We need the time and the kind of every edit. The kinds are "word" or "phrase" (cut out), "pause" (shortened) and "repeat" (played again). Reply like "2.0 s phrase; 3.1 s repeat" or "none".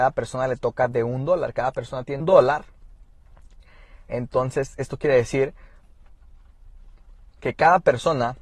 2.2 s word